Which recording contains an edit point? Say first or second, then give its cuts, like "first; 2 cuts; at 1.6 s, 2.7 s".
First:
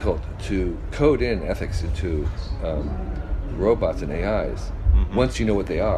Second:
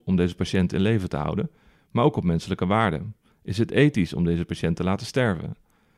first; 1 cut; at 0.9 s